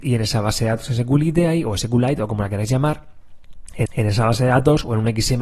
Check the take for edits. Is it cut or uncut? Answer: cut